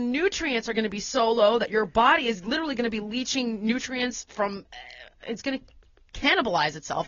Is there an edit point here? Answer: no; 0 cuts

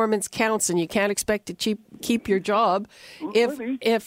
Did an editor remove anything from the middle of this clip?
no; 0 cuts

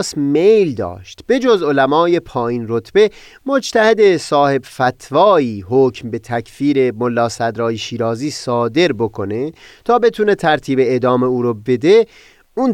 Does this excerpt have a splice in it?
no; 0 cuts

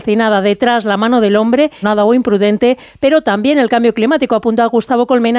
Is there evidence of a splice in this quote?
yes; 1 cut; at 1.8 s

